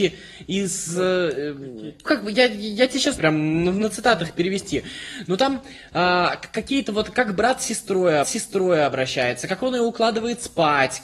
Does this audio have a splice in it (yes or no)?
yes